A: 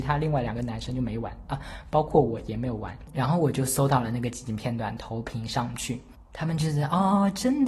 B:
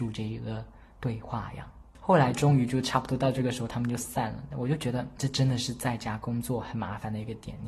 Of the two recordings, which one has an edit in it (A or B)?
B